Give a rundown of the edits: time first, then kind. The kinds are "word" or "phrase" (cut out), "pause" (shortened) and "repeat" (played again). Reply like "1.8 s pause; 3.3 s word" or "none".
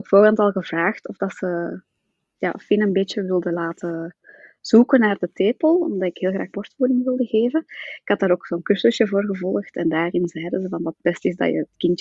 none

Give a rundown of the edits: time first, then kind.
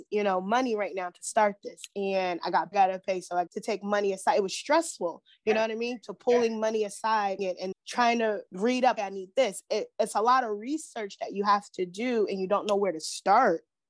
2.7 s phrase; 3.5 s word; 7.4 s phrase; 7.7 s word; 8.5 s pause; 9.0 s word

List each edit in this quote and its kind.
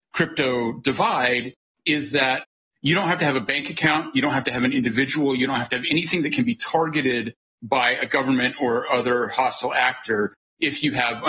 none

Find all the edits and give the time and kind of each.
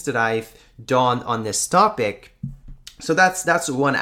none

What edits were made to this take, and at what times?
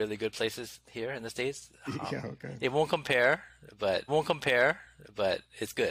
4.1 s repeat

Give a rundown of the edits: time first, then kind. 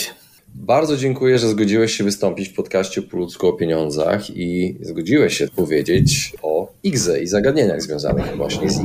5.5 s word

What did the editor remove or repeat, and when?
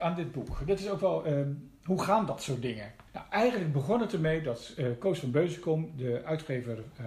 3.1 s pause

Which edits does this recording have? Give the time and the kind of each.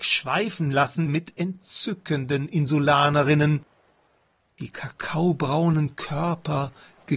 1.1 s phrase

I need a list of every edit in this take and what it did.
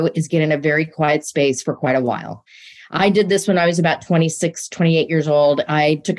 none

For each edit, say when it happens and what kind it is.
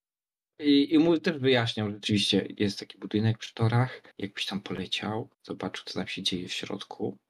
4.1 s pause; 5.3 s pause

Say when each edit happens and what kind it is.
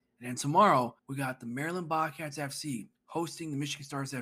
1.0 s pause; 2.9 s pause

